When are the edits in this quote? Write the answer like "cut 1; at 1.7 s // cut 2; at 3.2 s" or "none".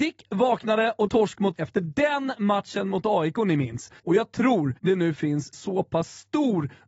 cut 1; at 1.1 s // cut 2; at 1.5 s // cut 3; at 4.0 s // cut 4; at 4.8 s // cut 5; at 5.5 s